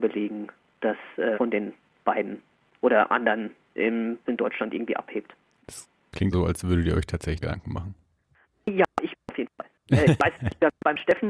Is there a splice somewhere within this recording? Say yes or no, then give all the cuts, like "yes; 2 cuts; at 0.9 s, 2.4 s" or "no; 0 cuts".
yes; 6 cuts; at 1.3 s, 2.0 s, 3.8 s, 4.3 s, 6.3 s, 7.4 s